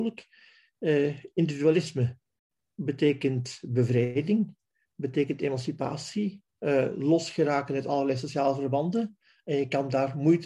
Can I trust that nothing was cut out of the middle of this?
yes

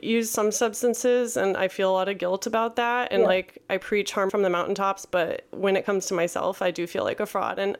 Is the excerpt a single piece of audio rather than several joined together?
no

